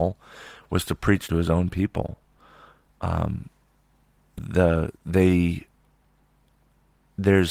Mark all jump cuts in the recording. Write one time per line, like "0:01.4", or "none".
0:01.3
0:04.4